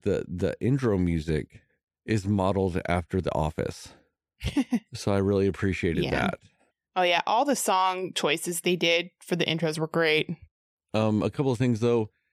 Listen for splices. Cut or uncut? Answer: uncut